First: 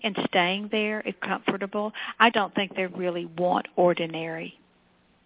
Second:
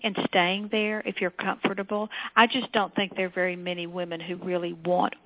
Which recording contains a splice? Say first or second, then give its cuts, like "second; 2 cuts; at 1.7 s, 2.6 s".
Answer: first; 3 cuts; at 1.1 s, 2.3 s, 2.9 s